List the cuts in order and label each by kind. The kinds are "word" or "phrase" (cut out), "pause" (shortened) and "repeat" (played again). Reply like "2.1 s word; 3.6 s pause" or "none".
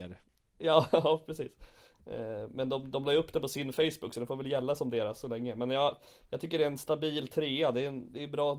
none